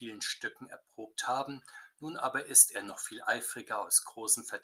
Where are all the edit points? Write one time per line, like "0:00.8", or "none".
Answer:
none

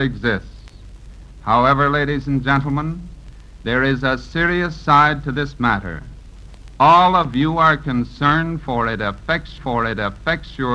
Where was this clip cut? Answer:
0:09.6

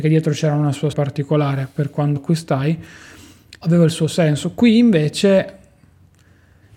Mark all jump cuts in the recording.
0:00.9
0:02.2
0:03.6

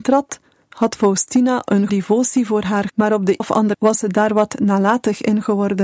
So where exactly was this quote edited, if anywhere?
0:01.9
0:02.9
0:03.4
0:03.7

